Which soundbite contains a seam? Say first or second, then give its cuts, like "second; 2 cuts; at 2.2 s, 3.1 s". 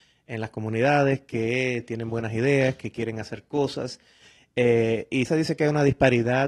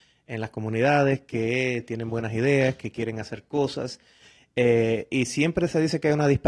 first; 1 cut; at 5.3 s